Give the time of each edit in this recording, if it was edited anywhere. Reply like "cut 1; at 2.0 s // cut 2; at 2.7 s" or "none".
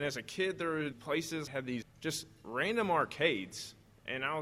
cut 1; at 0.9 s // cut 2; at 1.5 s // cut 3; at 1.8 s

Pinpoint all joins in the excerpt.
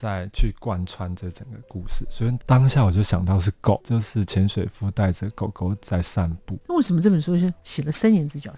cut 1; at 3.8 s

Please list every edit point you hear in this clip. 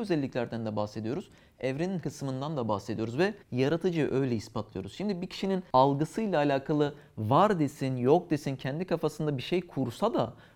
cut 1; at 2.0 s // cut 2; at 3.4 s

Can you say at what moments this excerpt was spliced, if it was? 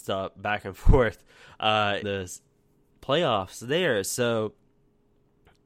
cut 1; at 2.0 s

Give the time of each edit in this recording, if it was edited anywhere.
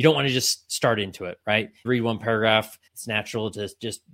cut 1; at 1.8 s // cut 2; at 2.9 s

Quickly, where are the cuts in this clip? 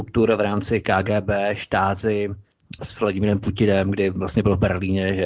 cut 1; at 2.8 s

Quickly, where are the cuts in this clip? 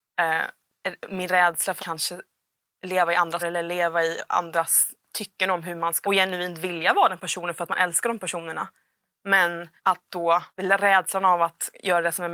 cut 1; at 1.8 s // cut 2; at 3.4 s // cut 3; at 6.0 s // cut 4; at 9.8 s // cut 5; at 10.5 s

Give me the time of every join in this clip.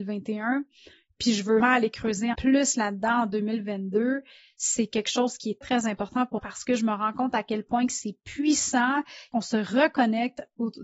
cut 1; at 1.6 s // cut 2; at 2.3 s // cut 3; at 5.6 s // cut 4; at 6.4 s // cut 5; at 9.3 s

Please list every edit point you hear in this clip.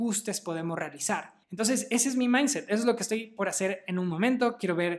cut 1; at 1.4 s

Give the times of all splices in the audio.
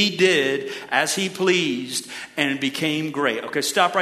none

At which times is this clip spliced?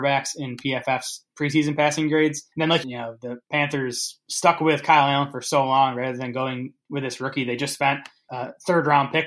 cut 1; at 2.5 s // cut 2; at 2.8 s // cut 3; at 3.4 s

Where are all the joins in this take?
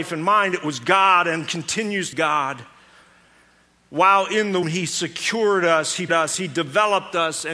cut 1; at 2.1 s // cut 2; at 4.6 s // cut 3; at 6.1 s

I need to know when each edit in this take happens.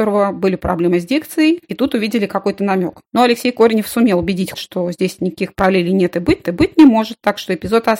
cut 1; at 4.5 s // cut 2; at 6.4 s

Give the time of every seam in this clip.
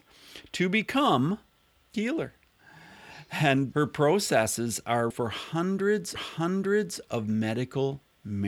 cut 1; at 1.9 s // cut 2; at 3.7 s // cut 3; at 5.1 s // cut 4; at 6.2 s

